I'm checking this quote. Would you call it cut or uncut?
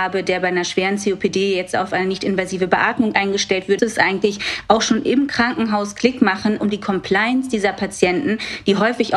cut